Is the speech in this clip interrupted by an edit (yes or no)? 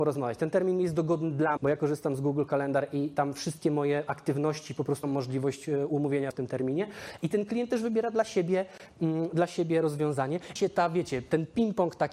yes